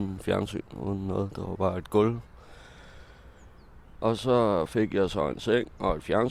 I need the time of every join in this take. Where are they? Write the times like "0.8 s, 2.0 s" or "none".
none